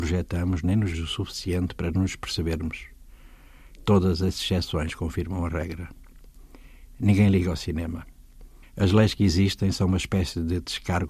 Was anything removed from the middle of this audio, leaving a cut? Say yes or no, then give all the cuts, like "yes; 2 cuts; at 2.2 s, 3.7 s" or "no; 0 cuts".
yes; 2 cuts; at 0.9 s, 8.6 s